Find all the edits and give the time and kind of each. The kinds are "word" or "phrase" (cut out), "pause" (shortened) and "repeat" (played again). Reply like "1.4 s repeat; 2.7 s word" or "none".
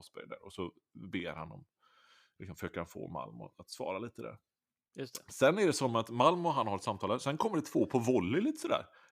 none